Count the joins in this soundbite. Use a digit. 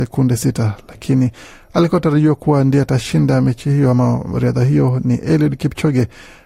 0